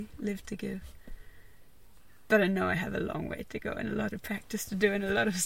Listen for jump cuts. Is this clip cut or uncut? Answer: uncut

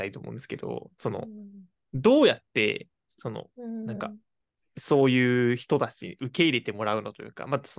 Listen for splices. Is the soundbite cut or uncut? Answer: uncut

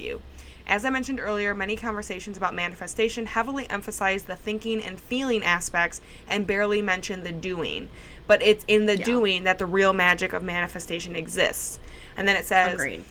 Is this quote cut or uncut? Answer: uncut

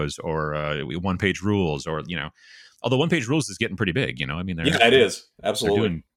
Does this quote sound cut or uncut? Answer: uncut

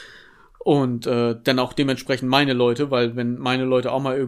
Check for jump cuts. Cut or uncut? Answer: uncut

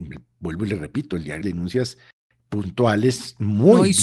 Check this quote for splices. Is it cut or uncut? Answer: cut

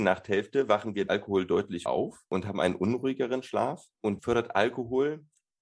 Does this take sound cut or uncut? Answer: cut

